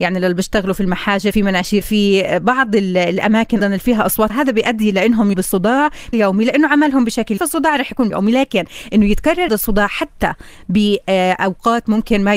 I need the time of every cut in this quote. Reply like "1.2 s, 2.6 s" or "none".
1.3 s, 1.8 s, 3.6 s, 4.3 s, 5.3 s, 6.1 s, 7.4 s, 8.1 s, 9.5 s